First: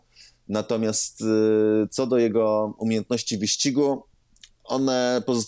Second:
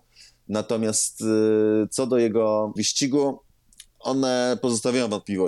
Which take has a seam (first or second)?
second